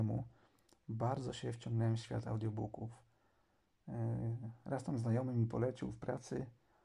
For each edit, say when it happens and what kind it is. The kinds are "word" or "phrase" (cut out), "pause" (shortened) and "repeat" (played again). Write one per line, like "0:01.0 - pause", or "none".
none